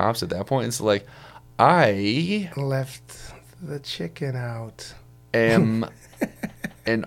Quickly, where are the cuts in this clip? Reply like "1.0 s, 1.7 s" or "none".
none